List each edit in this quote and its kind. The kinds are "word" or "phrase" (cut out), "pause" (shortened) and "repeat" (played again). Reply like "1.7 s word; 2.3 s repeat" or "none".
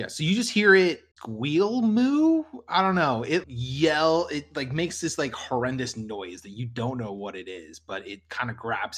1.1 s pause; 3.4 s word